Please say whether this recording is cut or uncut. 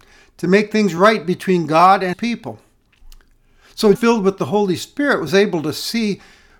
cut